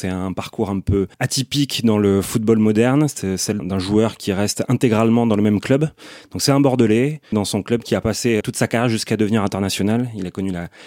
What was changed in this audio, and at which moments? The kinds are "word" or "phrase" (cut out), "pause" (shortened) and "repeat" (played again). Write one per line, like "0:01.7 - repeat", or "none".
0:01.1 - pause
0:03.6 - word
0:07.3 - phrase
0:08.4 - word